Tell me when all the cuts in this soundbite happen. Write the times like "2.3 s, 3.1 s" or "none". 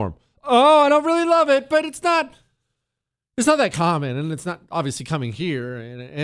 none